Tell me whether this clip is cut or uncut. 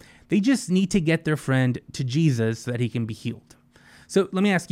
uncut